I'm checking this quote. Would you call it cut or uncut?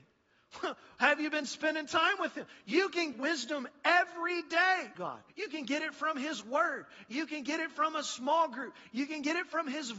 cut